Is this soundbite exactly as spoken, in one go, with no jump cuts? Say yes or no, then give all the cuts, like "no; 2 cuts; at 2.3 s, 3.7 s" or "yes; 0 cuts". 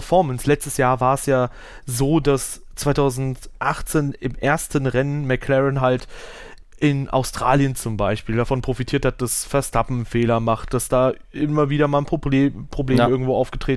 yes; 0 cuts